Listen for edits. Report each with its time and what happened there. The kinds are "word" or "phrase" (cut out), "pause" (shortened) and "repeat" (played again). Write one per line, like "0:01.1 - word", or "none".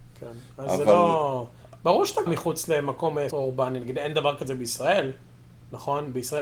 0:02.3 - word
0:03.3 - word